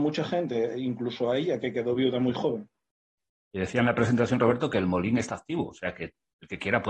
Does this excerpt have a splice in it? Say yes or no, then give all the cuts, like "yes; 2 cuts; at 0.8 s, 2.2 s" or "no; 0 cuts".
no; 0 cuts